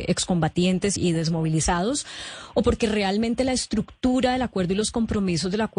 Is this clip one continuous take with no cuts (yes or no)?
no